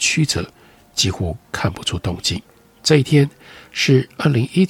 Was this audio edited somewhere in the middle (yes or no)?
no